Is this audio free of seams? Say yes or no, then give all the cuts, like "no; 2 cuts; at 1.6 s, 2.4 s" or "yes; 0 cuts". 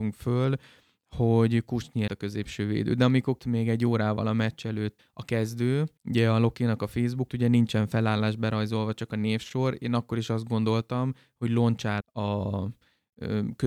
no; 6 cuts; at 2.1 s, 3.4 s, 5.0 s, 6.0 s, 7.3 s, 12.0 s